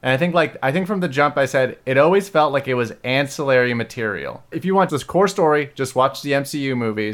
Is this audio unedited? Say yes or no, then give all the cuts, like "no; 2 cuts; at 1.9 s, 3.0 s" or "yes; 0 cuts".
no; 2 cuts; at 4.5 s, 4.9 s